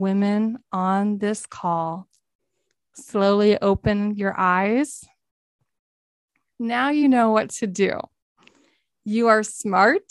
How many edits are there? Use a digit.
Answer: 0